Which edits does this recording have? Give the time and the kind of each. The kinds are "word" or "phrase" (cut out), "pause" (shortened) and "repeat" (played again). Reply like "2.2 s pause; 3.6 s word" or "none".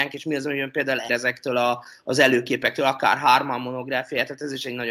1.1 s word

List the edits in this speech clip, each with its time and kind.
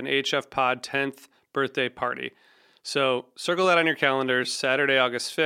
none

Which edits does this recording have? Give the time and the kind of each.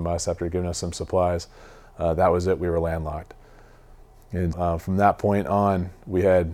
4.5 s word

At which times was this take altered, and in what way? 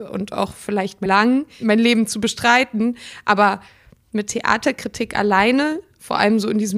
1.1 s word

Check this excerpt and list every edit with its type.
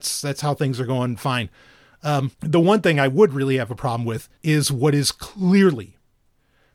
2.3 s pause; 4.4 s pause

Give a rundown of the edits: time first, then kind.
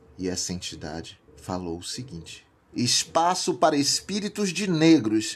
1.3 s pause; 2.7 s phrase

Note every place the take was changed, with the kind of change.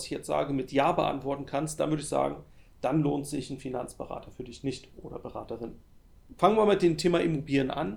none

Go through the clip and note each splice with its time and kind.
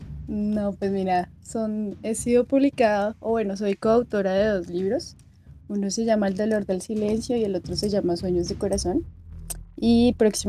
none

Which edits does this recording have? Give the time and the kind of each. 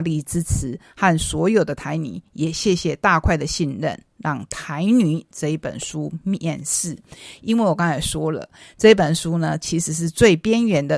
none

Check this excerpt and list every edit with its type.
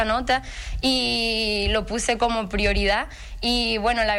none

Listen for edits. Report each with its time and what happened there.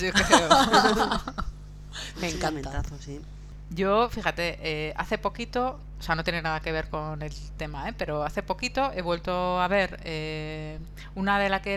none

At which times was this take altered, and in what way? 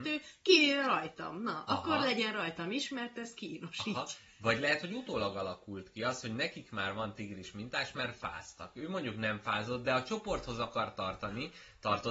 none

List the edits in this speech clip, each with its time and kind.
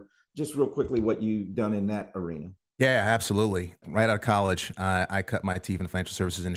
none

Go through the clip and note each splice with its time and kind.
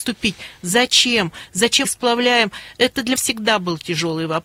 1.8 s word; 3.2 s word

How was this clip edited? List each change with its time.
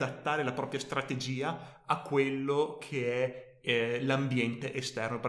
none

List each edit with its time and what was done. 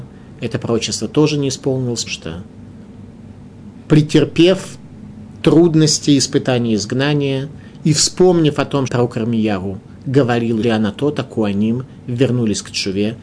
2.1 s word; 8.9 s word; 10.6 s phrase

